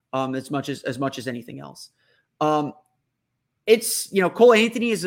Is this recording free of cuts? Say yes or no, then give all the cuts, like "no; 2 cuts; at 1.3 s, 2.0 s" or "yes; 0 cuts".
yes; 0 cuts